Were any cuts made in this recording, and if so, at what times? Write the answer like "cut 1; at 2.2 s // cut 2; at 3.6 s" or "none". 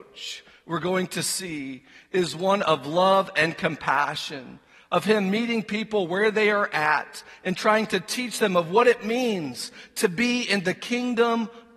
none